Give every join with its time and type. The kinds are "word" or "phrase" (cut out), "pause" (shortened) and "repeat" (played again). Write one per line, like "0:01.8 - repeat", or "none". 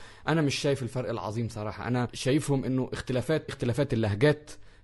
0:03.5 - word